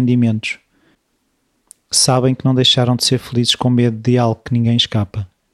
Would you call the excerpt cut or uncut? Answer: uncut